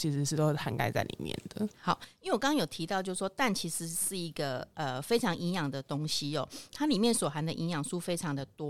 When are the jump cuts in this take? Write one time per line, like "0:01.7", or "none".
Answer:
none